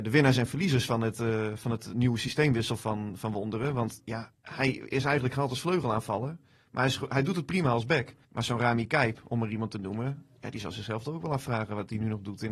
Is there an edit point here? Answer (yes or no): yes